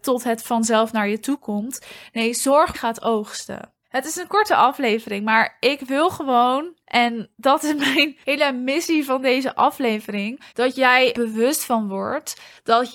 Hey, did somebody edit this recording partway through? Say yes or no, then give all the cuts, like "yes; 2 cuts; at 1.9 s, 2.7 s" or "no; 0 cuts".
yes; 6 cuts; at 2.7 s, 3.8 s, 7.3 s, 8.2 s, 10.5 s, 11.1 s